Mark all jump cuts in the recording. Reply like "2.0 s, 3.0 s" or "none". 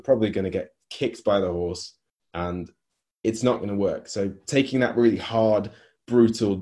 none